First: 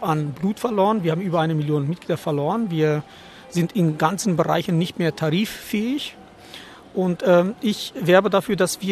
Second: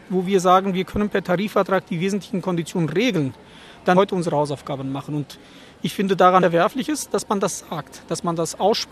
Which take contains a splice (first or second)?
second